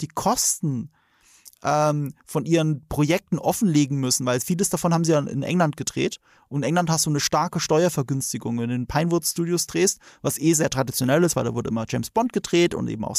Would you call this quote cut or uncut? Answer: uncut